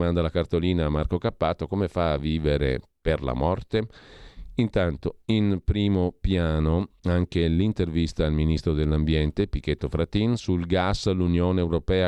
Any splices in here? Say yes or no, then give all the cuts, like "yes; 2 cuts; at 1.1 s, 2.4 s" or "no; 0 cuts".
no; 0 cuts